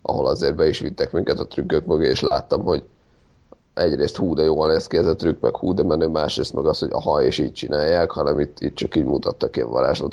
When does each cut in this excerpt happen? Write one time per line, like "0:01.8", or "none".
none